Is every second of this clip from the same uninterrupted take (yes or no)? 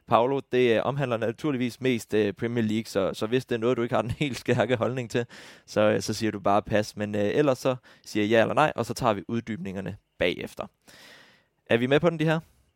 yes